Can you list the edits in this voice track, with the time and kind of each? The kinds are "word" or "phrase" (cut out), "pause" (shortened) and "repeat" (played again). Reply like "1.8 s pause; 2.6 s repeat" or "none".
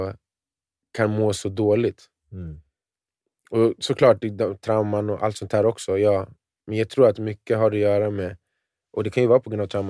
none